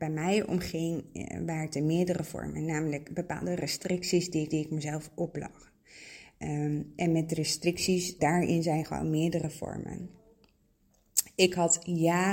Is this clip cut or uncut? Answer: cut